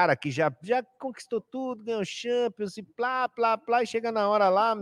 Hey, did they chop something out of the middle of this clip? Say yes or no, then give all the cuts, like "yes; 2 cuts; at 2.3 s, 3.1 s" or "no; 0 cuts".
no; 0 cuts